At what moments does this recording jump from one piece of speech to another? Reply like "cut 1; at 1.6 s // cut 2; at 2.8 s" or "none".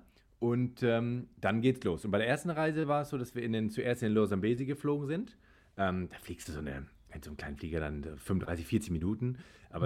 none